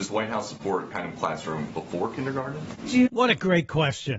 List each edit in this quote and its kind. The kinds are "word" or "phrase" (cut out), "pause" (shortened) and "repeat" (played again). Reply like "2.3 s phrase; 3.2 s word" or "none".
0.9 s word; 1.7 s word